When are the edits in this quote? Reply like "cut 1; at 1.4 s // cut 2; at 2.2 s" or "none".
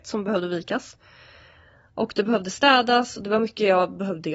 none